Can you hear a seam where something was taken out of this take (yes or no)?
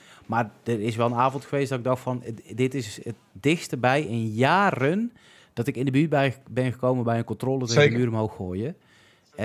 no